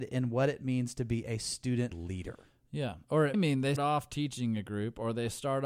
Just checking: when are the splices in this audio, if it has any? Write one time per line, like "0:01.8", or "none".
0:01.9
0:03.3
0:03.8